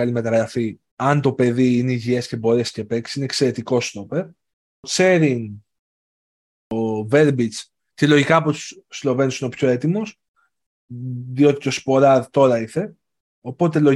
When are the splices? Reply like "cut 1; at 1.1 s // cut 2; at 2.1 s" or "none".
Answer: none